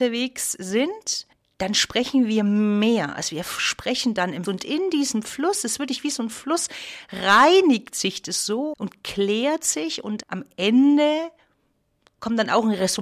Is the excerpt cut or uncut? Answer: cut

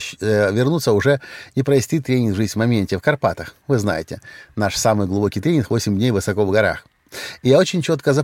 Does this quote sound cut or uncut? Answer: uncut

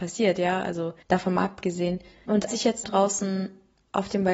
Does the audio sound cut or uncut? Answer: cut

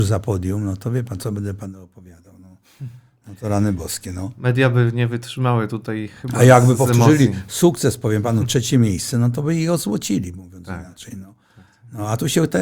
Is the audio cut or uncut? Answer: uncut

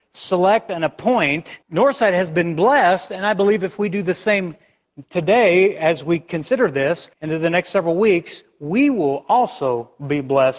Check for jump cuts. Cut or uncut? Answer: cut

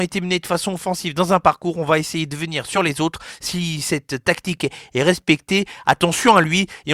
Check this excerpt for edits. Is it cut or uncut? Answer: uncut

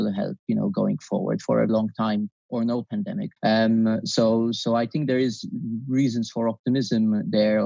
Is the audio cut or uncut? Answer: cut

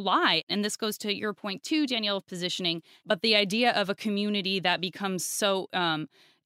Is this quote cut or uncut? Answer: uncut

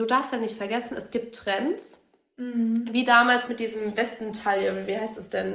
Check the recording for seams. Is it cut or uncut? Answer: uncut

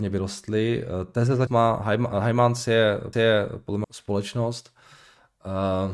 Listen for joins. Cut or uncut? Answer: cut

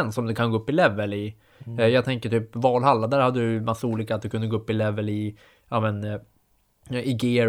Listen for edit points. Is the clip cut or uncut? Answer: uncut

